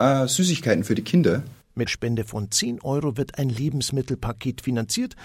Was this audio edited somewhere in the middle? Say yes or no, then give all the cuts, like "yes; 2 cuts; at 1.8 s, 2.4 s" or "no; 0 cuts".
yes; 1 cut; at 1.9 s